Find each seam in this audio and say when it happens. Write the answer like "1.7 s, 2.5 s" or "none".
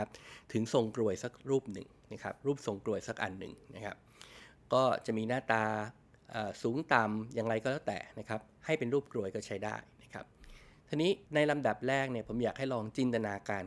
11.3 s